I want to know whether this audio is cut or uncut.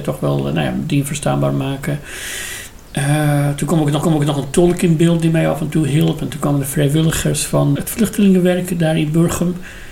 cut